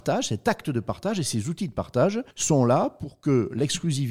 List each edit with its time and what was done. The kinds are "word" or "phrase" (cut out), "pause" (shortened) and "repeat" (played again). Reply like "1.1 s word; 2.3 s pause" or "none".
2.3 s pause